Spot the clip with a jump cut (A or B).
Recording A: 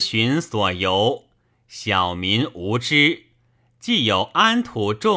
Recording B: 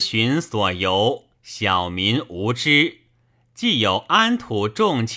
B